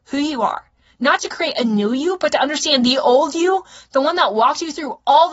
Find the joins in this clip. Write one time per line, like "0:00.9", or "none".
0:01.2